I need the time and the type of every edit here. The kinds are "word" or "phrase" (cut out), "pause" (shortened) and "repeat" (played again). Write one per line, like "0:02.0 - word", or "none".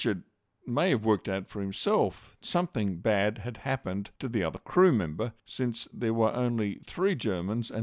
0:02.4 - word
0:04.2 - pause
0:05.4 - pause